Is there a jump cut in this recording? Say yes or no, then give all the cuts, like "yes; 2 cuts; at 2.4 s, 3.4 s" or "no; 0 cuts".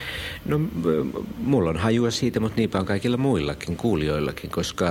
no; 0 cuts